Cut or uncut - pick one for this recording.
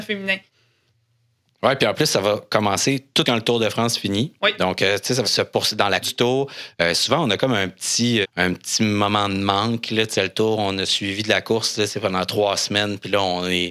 cut